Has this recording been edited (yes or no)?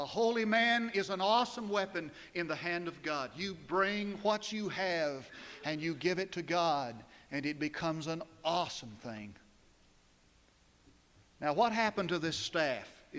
no